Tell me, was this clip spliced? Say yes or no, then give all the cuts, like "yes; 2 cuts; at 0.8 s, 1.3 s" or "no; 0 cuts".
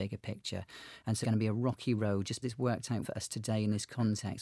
yes; 3 cuts; at 1.2 s, 2.4 s, 3.0 s